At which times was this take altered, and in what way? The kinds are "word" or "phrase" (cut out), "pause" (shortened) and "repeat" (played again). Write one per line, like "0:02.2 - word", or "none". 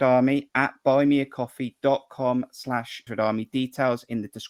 0:03.1 - word